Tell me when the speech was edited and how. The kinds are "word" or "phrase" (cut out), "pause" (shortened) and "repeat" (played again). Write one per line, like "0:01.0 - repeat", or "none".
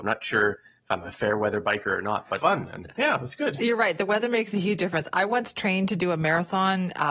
0:02.4 - phrase
0:02.9 - word

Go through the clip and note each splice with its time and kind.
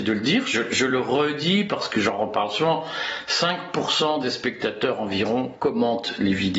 none

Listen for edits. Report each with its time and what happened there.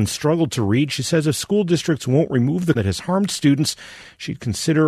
0:02.8 - word

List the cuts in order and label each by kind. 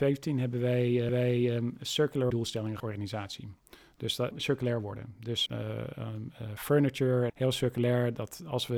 0:01.1 - repeat
0:02.3 - word
0:02.8 - phrase
0:04.3 - phrase
0:05.5 - word
0:07.3 - phrase

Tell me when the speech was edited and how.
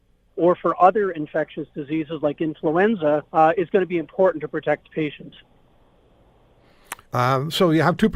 0:03.3 - pause
0:07.0 - pause

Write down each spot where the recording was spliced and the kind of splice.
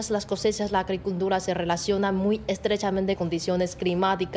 0:03.2 - phrase

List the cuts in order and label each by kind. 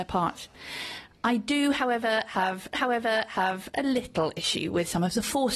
0:02.7 - repeat

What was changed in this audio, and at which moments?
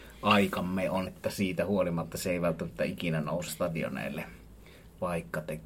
0:01.1 - word
0:03.5 - word

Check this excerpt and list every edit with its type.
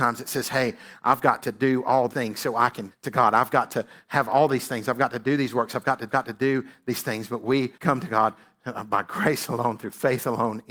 0:02.1 - word
0:02.9 - word
0:06.1 - repeat
0:07.7 - pause

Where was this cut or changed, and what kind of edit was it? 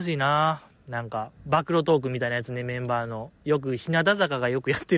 0:01.4 - pause
0:03.4 - pause

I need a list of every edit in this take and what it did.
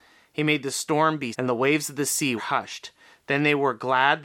0:01.3 - word
0:02.4 - word

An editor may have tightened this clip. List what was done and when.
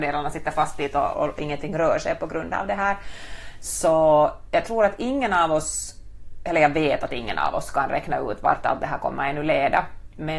0:01.1 - word

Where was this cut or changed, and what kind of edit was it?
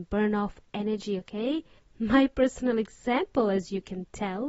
0:01.8 - pause

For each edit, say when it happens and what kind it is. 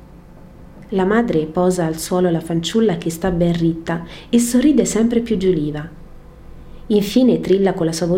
none

